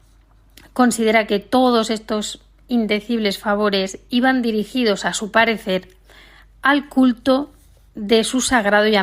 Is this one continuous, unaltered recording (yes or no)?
yes